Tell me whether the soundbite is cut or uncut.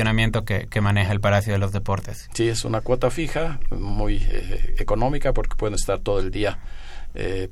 uncut